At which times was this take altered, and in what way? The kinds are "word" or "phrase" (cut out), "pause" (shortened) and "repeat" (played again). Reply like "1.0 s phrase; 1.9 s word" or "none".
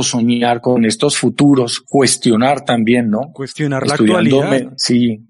none